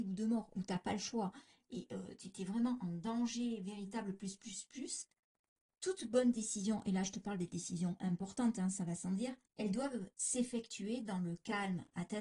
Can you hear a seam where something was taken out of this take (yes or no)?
yes